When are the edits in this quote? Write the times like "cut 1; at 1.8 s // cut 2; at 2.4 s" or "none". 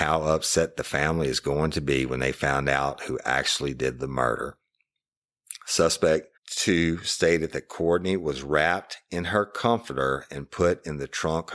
cut 1; at 6.4 s